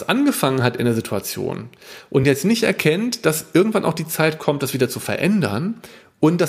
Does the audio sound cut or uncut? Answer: uncut